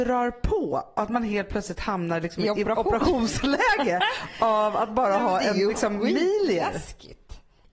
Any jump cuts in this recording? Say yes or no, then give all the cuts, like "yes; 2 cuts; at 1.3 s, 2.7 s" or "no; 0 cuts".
no; 0 cuts